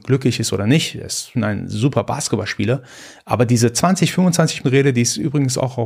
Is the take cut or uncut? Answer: cut